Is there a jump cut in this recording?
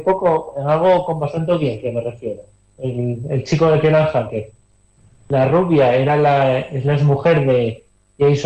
no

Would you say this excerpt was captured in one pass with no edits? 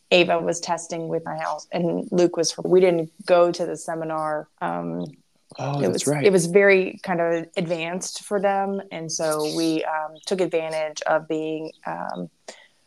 no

